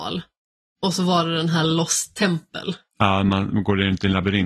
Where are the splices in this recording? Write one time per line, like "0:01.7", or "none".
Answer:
none